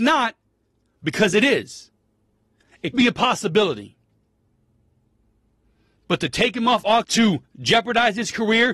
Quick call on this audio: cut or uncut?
cut